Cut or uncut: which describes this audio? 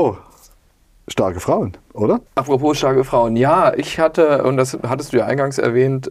cut